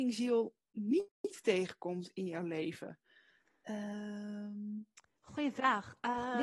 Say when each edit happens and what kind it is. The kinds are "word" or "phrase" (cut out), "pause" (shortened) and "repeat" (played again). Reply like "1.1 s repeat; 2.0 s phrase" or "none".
none